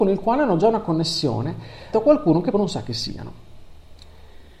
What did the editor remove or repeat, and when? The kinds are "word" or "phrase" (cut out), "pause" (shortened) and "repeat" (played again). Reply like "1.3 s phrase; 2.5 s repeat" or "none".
1.9 s word; 2.5 s word